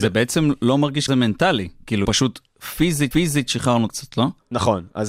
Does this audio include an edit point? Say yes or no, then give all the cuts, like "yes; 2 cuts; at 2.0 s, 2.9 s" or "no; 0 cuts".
yes; 4 cuts; at 1.1 s, 2.0 s, 3.1 s, 3.9 s